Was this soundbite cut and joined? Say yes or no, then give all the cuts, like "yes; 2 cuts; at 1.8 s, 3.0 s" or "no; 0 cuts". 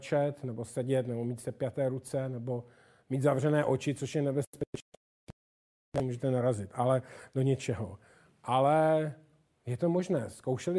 no; 0 cuts